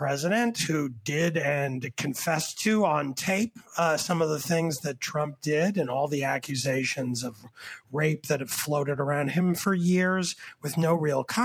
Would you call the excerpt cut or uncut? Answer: uncut